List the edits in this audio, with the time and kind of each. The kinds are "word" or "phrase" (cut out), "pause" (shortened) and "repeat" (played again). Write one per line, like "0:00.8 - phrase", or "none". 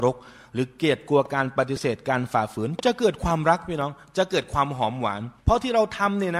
0:05.4 - pause